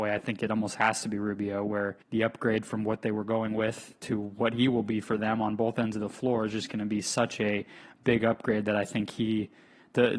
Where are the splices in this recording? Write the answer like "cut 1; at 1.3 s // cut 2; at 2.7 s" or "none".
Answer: cut 1; at 2.0 s